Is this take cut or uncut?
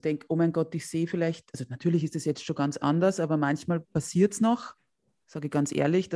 uncut